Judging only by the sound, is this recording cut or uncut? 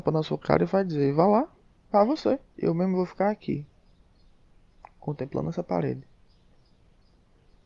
cut